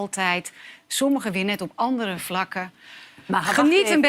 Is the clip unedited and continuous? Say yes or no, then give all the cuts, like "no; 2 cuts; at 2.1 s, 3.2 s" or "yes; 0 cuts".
yes; 0 cuts